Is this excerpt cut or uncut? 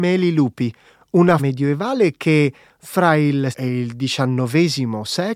cut